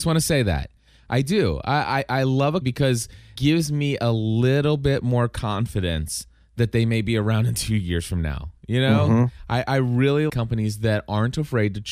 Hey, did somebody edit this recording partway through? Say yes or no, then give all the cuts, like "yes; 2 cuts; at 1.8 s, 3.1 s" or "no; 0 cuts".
yes; 3 cuts; at 2.6 s, 3.4 s, 10.3 s